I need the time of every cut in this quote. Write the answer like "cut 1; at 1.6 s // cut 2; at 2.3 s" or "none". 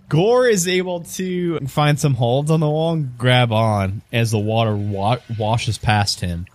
cut 1; at 1.6 s